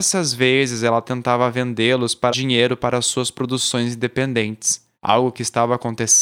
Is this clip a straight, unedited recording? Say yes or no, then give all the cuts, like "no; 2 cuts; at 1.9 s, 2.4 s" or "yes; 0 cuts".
no; 2 cuts; at 2.3 s, 4.9 s